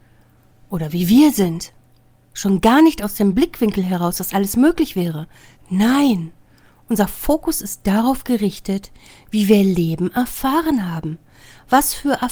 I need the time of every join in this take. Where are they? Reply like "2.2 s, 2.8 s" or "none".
none